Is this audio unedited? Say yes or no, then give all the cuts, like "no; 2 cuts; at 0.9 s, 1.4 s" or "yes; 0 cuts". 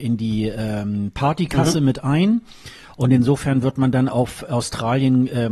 yes; 0 cuts